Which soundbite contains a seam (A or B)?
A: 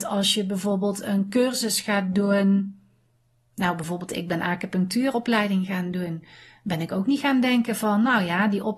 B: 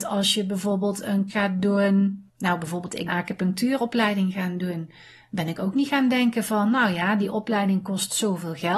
B